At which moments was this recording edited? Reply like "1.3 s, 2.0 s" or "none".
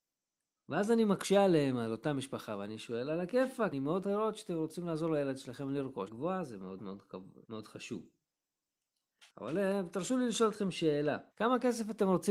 3.7 s, 4.0 s, 6.1 s, 6.8 s, 7.4 s, 9.3 s, 11.3 s